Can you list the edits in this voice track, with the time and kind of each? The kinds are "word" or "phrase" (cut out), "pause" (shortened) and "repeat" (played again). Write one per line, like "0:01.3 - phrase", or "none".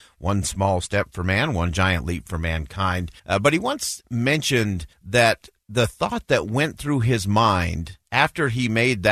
0:03.2 - pause
0:04.9 - pause
0:08.0 - pause

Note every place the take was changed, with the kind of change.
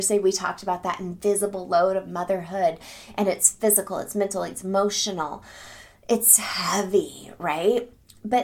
none

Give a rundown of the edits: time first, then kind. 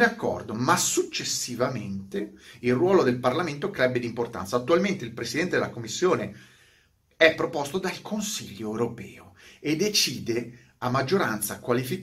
none

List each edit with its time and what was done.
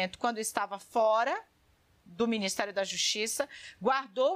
none

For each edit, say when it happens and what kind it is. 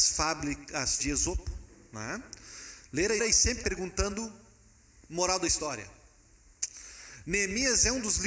0:01.0 - word
0:03.2 - word
0:03.6 - word

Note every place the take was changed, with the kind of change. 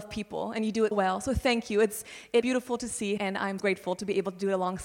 0:00.9 - word
0:02.4 - word
0:03.2 - phrase
0:03.6 - word

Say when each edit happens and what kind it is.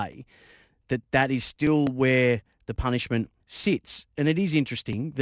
0:03.4 - pause

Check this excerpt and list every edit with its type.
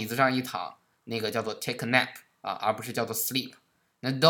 none

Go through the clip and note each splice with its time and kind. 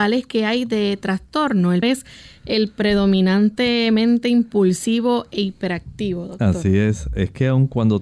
0:01.8 - word

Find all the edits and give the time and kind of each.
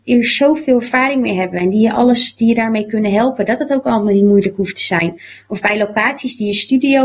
none

